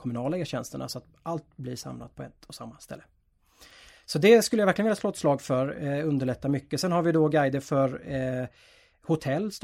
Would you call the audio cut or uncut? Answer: uncut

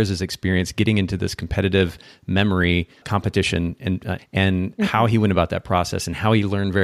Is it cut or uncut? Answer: cut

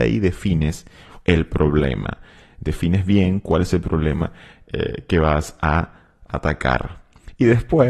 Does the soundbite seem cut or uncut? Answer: uncut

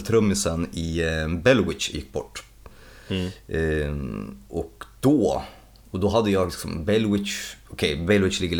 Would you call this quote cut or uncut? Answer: uncut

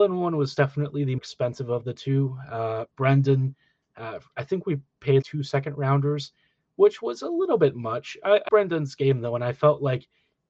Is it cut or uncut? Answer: cut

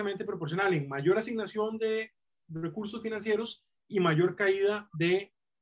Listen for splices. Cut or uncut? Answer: uncut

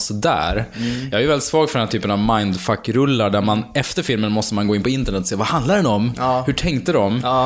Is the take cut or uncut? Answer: uncut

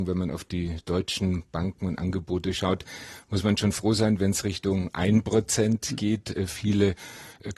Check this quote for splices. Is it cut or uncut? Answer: uncut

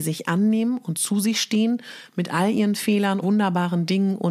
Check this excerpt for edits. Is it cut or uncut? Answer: cut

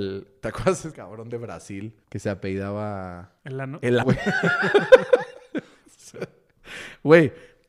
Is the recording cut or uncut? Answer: cut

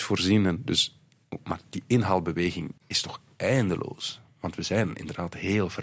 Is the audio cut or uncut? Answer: cut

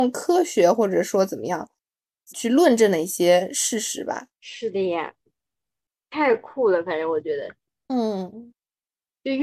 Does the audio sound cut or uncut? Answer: cut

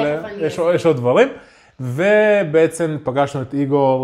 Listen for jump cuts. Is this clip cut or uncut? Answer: uncut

